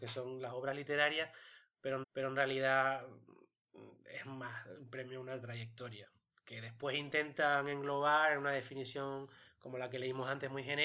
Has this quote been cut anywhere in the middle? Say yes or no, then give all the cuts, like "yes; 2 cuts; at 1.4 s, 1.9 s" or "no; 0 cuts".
yes; 1 cut; at 2.0 s